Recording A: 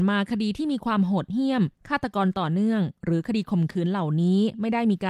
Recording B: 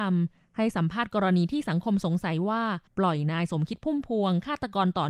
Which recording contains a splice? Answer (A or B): B